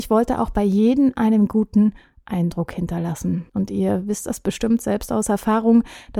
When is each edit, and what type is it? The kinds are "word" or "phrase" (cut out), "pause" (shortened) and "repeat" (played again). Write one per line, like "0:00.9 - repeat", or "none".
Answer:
0:03.5 - pause